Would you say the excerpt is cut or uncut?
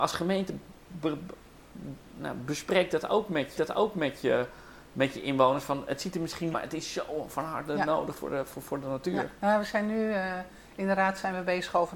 cut